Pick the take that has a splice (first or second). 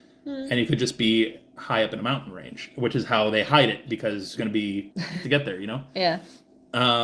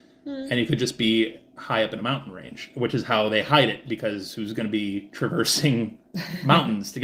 first